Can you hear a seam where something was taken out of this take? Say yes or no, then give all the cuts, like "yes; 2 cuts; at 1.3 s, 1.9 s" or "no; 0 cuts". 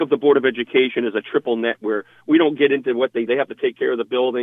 yes; 2 cuts; at 1.8 s, 3.3 s